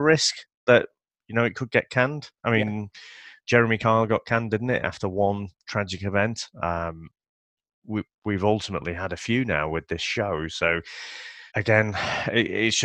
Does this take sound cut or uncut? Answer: cut